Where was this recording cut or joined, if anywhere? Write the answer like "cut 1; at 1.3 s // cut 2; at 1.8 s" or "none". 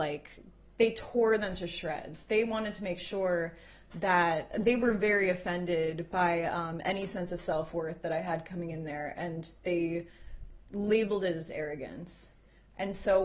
none